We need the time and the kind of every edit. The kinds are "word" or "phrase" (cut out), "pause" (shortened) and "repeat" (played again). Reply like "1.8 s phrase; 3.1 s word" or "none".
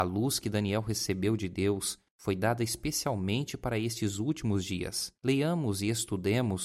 5.2 s pause